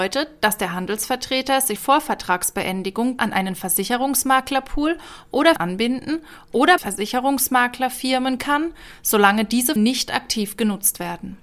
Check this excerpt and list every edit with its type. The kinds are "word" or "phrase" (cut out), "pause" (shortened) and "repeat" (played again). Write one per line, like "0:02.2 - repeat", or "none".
0:01.8 - word
0:03.2 - word
0:05.6 - word
0:06.8 - word
0:08.4 - word
0:09.8 - word